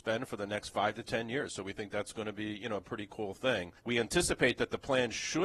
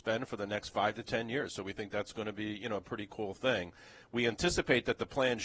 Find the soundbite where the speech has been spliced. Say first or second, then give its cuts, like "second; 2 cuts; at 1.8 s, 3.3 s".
first; 1 cut; at 3.8 s